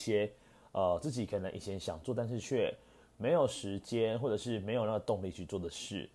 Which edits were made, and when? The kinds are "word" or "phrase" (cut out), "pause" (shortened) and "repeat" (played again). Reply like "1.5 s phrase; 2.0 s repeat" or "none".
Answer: none